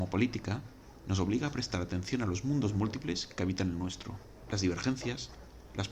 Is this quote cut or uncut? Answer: uncut